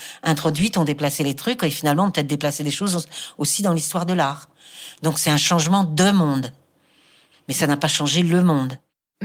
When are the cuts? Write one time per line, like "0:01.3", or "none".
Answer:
none